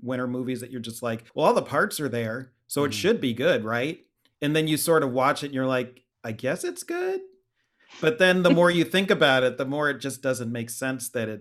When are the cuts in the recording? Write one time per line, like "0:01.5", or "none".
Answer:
0:01.3
0:06.1